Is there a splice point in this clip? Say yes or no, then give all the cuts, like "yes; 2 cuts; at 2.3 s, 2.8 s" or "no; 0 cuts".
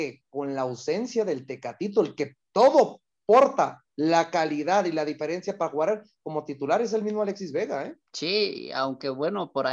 yes; 2 cuts; at 2.4 s, 8.1 s